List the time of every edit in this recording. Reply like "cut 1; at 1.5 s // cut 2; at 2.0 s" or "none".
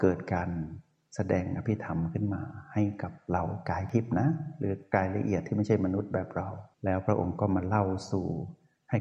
cut 1; at 6.7 s